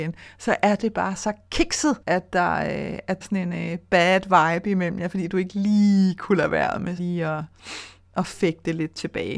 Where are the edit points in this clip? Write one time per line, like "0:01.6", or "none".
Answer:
0:02.0
0:03.2
0:07.0